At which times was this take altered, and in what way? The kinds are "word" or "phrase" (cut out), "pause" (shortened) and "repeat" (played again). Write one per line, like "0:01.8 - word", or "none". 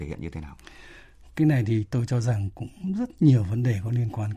none

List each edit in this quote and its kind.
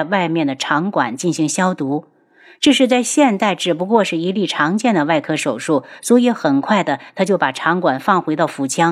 none

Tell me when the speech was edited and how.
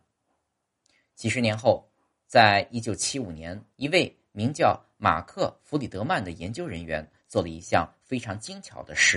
0:03.7 - pause

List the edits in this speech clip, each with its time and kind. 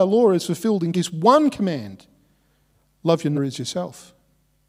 0:00.9 - word
0:03.3 - word

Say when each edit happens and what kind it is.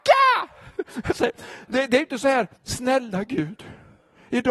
0:02.6 - pause

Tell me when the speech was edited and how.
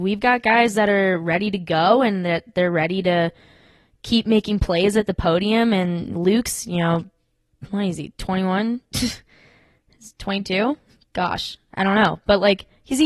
none

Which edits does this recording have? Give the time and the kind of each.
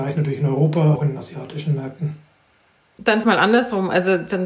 0:01.0 - word
0:03.2 - phrase

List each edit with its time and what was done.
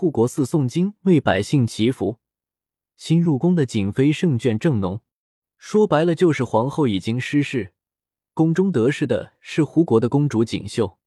none

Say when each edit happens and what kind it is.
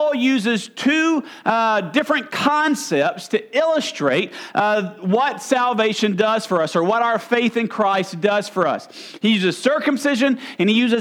none

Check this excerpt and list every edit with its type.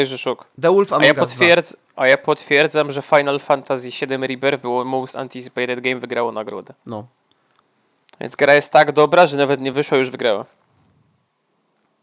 none

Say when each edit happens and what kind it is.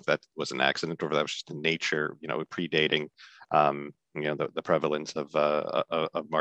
none

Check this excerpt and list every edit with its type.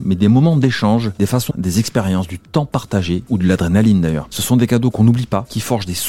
0:01.5 - word

